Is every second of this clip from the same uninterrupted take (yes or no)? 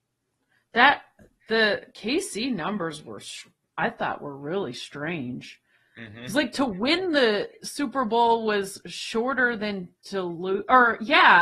yes